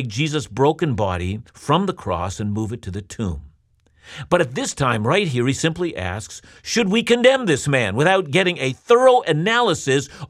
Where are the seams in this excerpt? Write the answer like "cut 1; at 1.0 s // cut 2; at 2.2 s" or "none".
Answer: cut 1; at 1.5 s